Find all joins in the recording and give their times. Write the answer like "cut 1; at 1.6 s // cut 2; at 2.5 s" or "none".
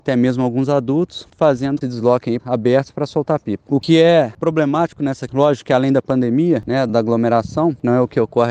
cut 1; at 1.8 s // cut 2; at 2.4 s // cut 3; at 3.8 s // cut 4; at 5.3 s // cut 5; at 6.9 s